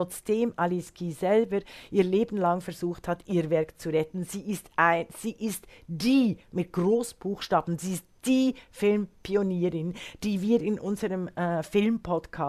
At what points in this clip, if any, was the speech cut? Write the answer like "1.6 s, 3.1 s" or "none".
none